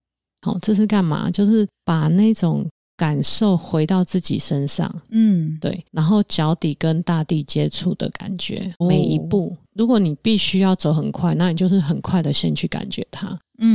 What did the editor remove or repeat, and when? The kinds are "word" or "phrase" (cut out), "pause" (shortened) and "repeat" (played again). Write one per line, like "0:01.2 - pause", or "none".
0:05.9 - pause
0:08.8 - word